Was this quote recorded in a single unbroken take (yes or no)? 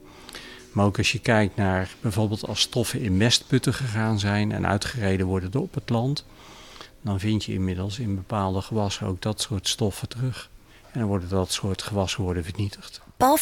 yes